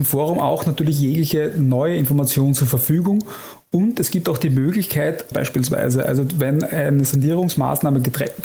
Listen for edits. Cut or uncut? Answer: cut